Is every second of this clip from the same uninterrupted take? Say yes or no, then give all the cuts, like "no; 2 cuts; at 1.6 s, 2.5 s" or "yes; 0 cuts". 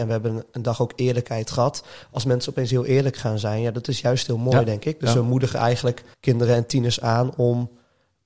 no; 1 cut; at 6.1 s